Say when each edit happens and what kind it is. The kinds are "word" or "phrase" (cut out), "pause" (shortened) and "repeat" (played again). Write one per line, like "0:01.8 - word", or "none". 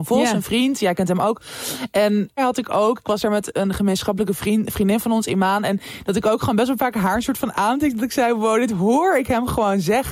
0:02.4 - word